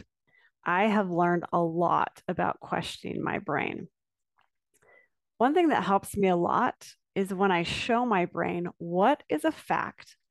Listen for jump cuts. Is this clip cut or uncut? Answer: uncut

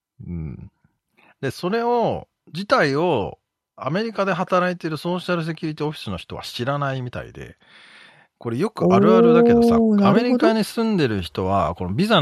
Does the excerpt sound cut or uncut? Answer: uncut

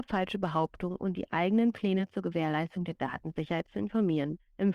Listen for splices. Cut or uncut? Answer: uncut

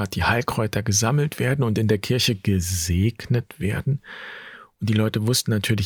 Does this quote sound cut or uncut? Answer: uncut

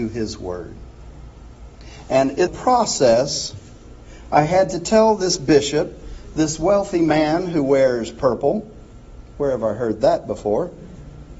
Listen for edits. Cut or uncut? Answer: cut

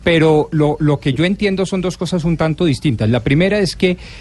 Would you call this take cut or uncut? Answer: uncut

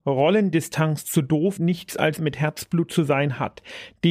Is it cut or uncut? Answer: cut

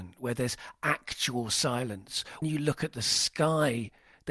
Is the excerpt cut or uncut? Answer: cut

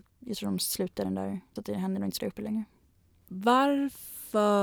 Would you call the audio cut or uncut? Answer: cut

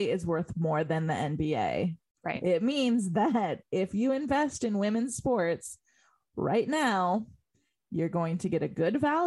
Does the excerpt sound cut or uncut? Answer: uncut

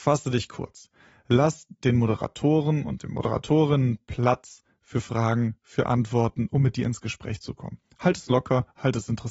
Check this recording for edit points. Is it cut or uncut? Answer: uncut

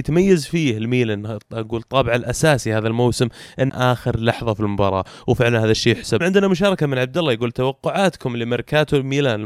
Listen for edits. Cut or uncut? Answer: cut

